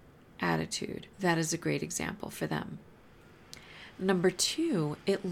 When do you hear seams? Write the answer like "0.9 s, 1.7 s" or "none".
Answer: 1.1 s